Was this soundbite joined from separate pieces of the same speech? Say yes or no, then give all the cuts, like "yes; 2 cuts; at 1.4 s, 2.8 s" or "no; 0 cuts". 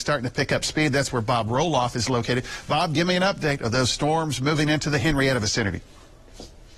no; 0 cuts